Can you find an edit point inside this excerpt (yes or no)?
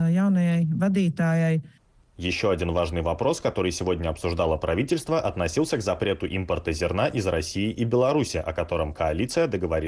no